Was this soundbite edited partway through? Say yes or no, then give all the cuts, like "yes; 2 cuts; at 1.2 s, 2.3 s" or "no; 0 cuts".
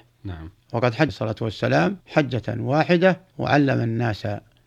yes; 3 cuts; at 1.1 s, 2.0 s, 3.3 s